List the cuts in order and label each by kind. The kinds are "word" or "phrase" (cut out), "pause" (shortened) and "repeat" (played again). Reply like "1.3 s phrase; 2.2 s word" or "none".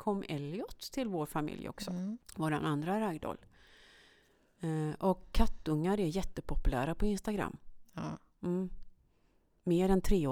2.2 s pause